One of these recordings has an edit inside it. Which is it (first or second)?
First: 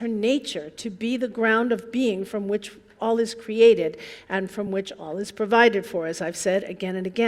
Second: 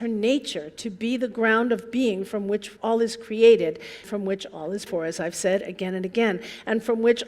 second